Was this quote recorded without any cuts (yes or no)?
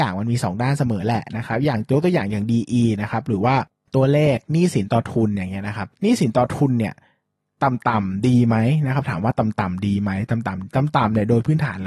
yes